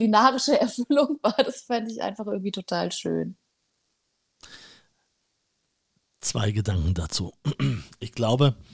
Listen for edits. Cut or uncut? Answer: uncut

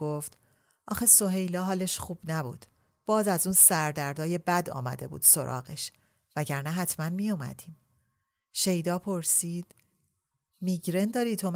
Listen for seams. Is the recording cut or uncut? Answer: uncut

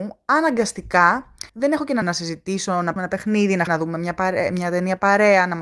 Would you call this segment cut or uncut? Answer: cut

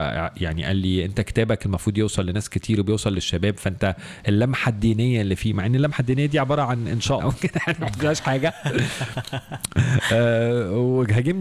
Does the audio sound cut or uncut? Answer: cut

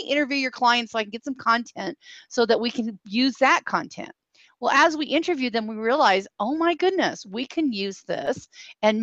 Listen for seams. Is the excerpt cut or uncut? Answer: uncut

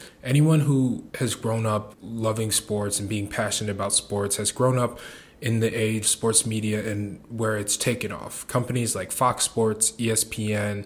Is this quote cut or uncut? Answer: cut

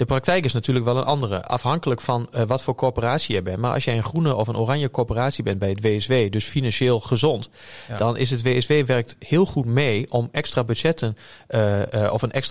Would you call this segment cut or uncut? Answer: uncut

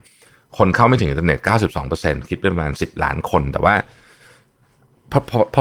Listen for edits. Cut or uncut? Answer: uncut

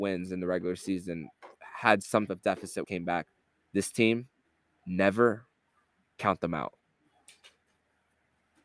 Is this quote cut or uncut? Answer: cut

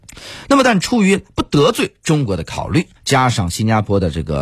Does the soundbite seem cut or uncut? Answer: cut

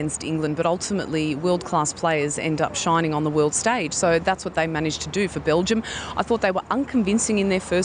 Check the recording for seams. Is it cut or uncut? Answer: uncut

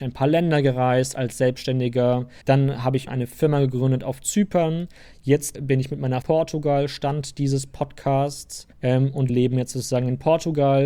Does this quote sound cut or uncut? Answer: cut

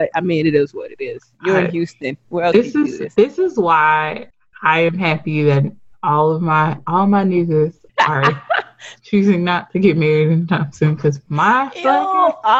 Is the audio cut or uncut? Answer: uncut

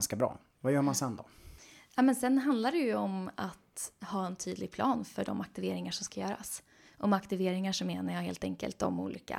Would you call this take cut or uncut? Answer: uncut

